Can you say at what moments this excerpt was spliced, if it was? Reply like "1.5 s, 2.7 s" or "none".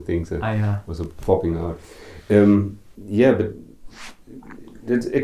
2.9 s